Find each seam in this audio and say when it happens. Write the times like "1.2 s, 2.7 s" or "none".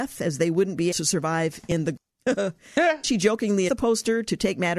0.9 s, 2.0 s, 3.0 s, 3.7 s